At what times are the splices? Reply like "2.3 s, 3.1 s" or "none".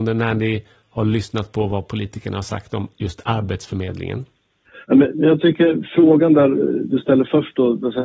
4.8 s